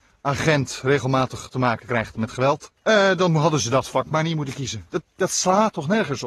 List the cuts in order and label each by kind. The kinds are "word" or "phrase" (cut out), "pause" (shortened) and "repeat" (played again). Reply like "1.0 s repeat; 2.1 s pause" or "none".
2.8 s pause